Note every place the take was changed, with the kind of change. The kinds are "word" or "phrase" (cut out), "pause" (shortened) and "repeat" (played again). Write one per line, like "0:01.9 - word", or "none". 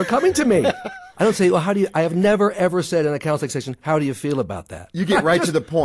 0:01.1 - pause

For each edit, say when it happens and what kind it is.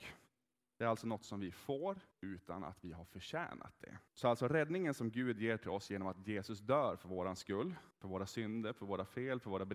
0:02.1 - pause
0:04.1 - pause
0:07.9 - pause

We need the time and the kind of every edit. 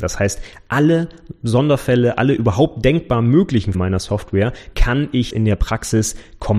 0:03.7 - word
0:04.7 - word
0:05.3 - word

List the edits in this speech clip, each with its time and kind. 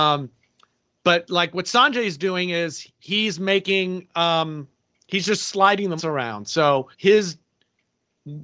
0:06.0 - word
0:06.9 - pause

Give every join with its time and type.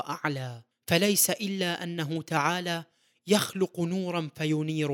none

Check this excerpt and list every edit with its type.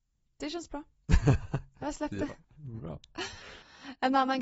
0:02.4 - pause

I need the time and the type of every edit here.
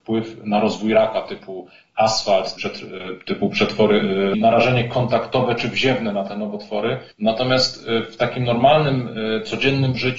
0:02.6 - word
0:04.3 - phrase
0:07.1 - pause

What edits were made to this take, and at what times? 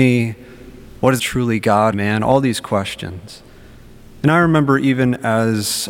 0:01.2 - phrase
0:01.9 - phrase

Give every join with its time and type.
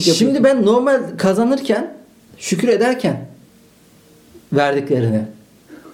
none

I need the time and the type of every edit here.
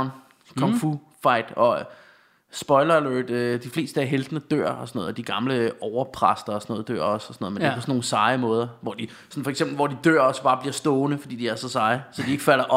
none

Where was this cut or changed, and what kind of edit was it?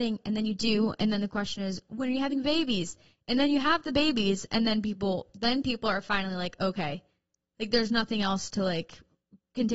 none

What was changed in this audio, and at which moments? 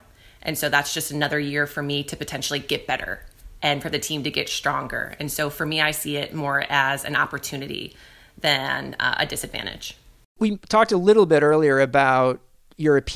none

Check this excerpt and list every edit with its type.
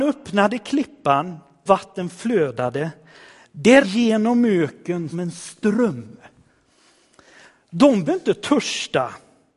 0:01.7 - word
0:03.8 - word
0:05.1 - word
0:08.1 - word

